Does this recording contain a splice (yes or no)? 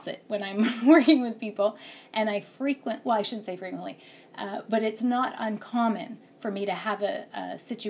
no